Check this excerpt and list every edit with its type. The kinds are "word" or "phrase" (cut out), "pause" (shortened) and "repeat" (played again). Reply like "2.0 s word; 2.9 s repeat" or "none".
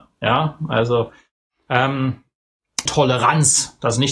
2.9 s word